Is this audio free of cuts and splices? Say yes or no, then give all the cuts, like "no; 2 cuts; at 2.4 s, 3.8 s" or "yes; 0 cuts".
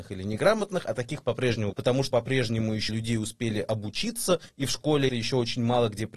no; 5 cuts; at 1.7 s, 2.1 s, 2.9 s, 4.5 s, 5.1 s